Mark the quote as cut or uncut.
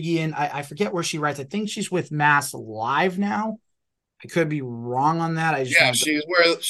uncut